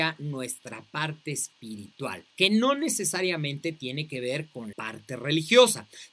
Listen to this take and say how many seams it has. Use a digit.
2